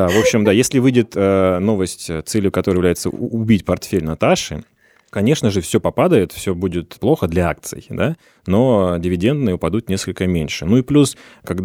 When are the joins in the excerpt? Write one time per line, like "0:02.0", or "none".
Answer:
none